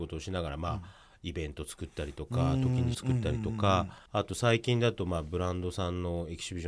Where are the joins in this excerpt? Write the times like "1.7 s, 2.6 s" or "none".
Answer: 2.9 s, 4.1 s